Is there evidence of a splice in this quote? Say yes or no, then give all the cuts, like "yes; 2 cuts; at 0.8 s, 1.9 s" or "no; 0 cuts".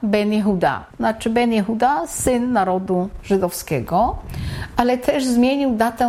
yes; 1 cut; at 0.9 s